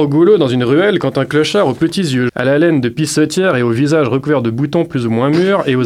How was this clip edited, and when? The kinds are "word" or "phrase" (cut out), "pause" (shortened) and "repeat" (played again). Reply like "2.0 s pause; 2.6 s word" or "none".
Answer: 2.3 s word